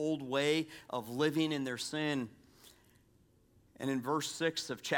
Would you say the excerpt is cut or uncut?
uncut